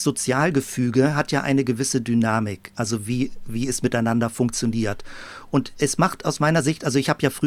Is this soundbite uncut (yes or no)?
yes